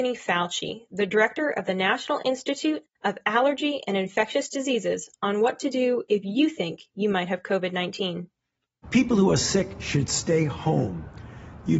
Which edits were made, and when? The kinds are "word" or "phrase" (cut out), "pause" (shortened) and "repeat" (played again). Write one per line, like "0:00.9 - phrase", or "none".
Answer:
none